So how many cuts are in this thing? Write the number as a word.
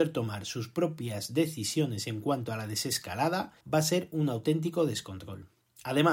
one